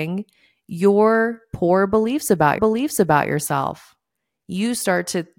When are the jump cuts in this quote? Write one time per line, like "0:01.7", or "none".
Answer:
0:02.6

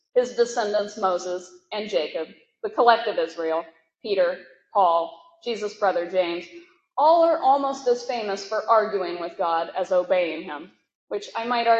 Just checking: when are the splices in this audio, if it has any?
none

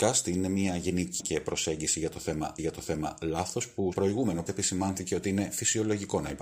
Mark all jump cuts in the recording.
0:01.2
0:02.6
0:03.9
0:04.5

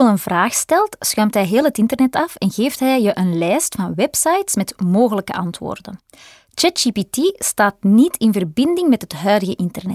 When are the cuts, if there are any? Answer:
none

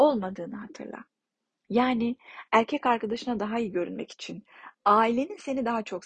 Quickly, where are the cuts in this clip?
none

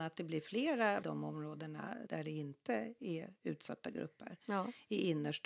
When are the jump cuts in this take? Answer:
0:01.0
0:02.1

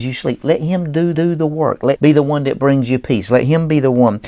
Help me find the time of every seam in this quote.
0:01.1
0:02.0

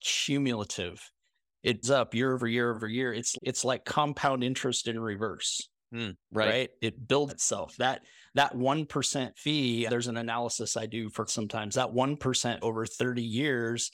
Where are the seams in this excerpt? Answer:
0:01.8
0:02.7
0:03.3
0:07.3
0:09.9
0:11.3
0:12.6

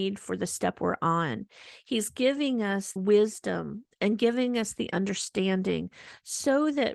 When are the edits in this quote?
0:03.0

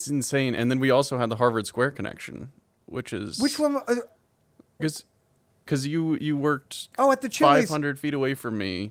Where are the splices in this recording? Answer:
0:04.8
0:06.9

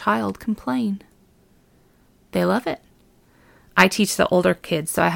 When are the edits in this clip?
none

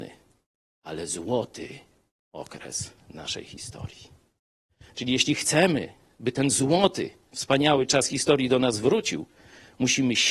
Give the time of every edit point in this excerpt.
none

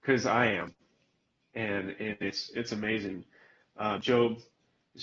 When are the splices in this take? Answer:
none

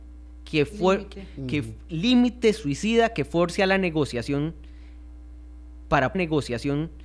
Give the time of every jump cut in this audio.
0:06.1

